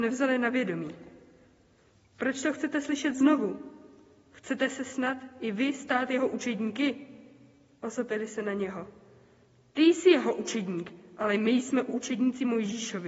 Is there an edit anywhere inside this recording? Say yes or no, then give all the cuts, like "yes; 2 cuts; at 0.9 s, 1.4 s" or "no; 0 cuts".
no; 0 cuts